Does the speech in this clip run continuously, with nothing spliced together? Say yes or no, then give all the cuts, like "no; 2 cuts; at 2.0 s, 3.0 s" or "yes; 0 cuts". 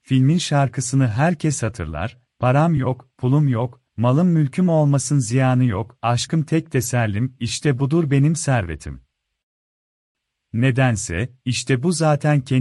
yes; 0 cuts